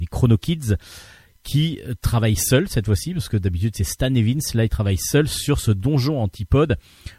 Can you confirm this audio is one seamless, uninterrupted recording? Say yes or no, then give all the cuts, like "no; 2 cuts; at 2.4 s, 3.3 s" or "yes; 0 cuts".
yes; 0 cuts